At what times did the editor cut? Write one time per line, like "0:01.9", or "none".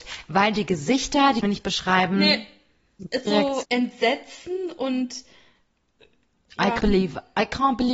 0:01.4
0:03.3
0:03.6
0:06.8